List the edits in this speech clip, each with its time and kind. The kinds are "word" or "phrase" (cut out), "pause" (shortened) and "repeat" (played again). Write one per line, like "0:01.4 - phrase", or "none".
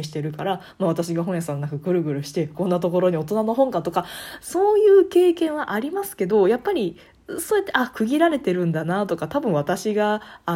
0:02.5 - word